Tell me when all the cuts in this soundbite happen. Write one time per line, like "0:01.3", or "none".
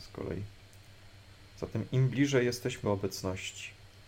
0:02.8